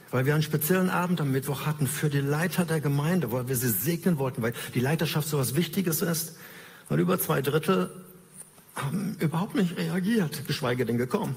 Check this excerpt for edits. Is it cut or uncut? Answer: uncut